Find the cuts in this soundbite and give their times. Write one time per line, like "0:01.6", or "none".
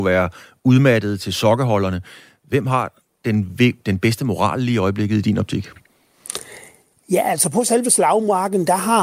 none